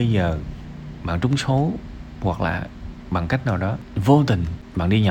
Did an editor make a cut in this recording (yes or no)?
no